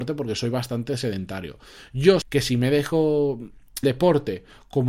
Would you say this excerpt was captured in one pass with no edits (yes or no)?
no